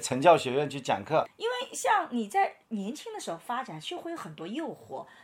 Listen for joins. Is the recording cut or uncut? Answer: cut